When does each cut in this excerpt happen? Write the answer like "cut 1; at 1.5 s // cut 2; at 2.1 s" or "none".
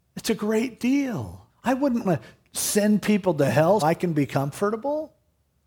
cut 1; at 1.5 s // cut 2; at 2.0 s // cut 3; at 3.8 s